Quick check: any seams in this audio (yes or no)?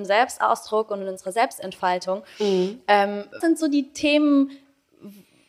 yes